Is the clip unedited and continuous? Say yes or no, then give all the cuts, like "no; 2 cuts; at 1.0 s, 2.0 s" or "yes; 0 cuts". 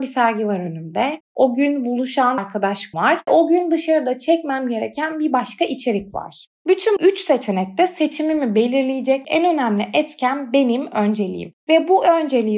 no; 4 cuts; at 2.4 s, 2.9 s, 3.3 s, 7.0 s